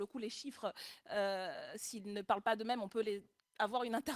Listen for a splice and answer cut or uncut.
uncut